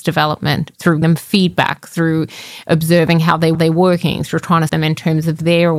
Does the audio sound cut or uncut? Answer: cut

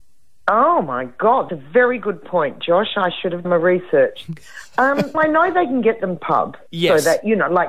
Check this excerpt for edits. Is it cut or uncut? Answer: cut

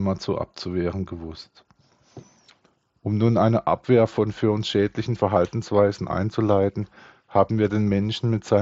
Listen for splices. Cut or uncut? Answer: uncut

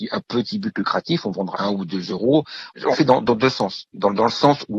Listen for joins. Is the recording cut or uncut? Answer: cut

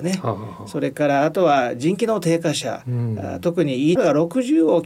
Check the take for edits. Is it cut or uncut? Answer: cut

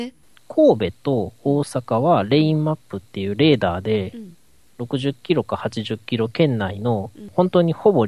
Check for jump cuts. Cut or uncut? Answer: uncut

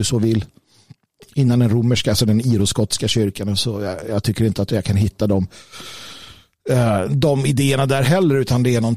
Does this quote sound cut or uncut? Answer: uncut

